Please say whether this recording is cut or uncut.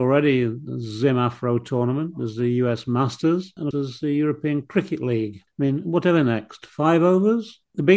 cut